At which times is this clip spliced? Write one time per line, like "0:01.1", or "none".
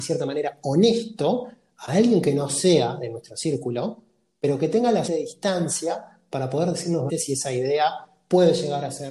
0:05.1
0:07.1